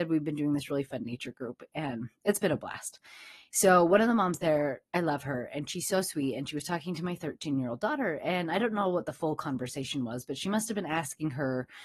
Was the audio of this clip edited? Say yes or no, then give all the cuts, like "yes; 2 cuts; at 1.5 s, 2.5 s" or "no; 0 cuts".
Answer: no; 0 cuts